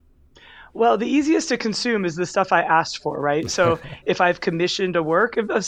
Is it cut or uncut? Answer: uncut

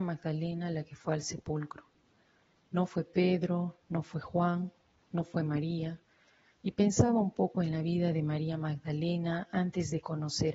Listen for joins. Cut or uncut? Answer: uncut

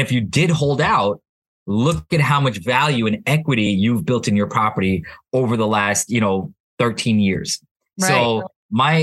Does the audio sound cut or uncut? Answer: uncut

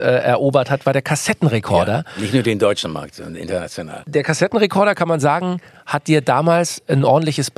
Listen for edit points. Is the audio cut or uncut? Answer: uncut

